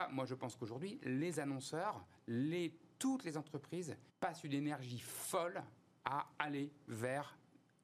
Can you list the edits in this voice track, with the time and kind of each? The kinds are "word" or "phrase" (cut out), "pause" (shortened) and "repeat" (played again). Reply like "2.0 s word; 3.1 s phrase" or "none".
4.1 s pause